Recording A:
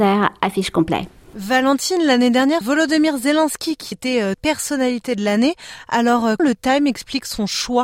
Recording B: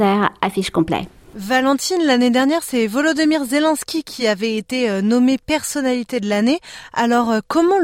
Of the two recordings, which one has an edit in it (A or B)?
A